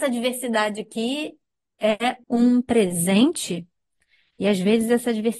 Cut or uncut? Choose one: cut